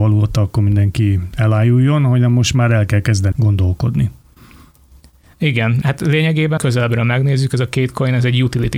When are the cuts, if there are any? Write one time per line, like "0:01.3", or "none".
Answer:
0:03.3
0:05.8
0:06.6